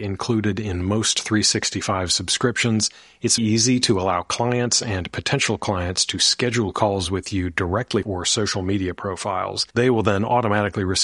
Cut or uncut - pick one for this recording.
cut